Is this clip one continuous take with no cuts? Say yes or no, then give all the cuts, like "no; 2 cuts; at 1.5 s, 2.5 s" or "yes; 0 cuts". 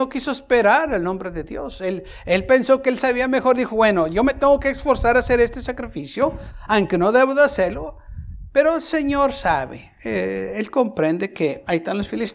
yes; 0 cuts